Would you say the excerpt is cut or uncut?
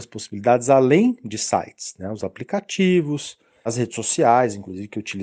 uncut